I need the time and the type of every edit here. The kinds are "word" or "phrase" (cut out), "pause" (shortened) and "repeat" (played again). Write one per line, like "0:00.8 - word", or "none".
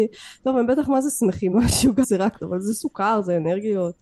0:01.5 - word
0:02.0 - word
0:02.4 - word